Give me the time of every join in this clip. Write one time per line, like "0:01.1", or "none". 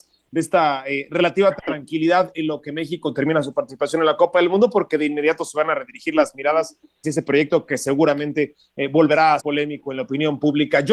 0:07.0
0:09.4